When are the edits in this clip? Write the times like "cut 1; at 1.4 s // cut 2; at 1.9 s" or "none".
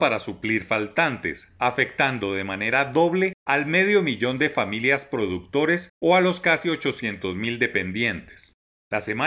none

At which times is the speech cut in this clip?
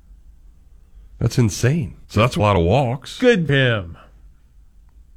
cut 1; at 2.0 s // cut 2; at 2.4 s // cut 3; at 3.5 s

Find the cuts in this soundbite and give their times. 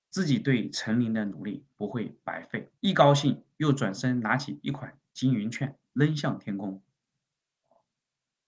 cut 1; at 2.8 s

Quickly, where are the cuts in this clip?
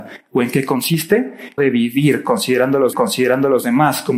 cut 1; at 1.6 s // cut 2; at 2.9 s

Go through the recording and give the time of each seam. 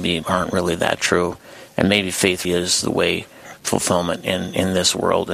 cut 1; at 2.4 s // cut 2; at 3.6 s

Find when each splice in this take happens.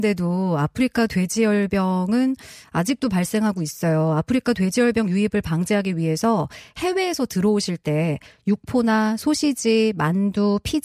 none

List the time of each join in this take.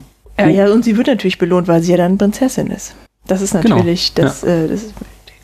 cut 1; at 3.1 s

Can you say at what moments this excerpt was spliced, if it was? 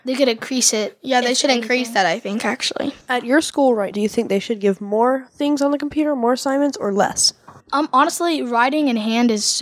cut 1; at 3.0 s // cut 2; at 3.9 s // cut 3; at 7.6 s

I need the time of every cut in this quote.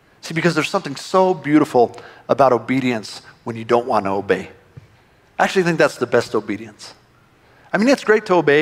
cut 1; at 4.9 s

